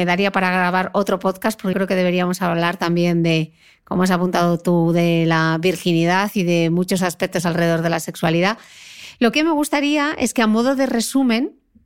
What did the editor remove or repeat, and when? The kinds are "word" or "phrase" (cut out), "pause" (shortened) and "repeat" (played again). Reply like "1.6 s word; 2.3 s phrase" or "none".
1.7 s word; 7.0 s word; 9.3 s word